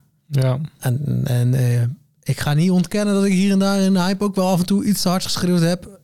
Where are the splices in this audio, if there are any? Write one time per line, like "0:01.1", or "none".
none